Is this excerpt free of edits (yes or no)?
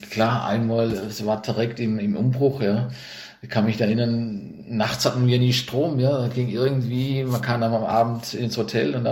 yes